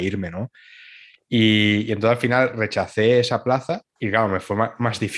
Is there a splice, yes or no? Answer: yes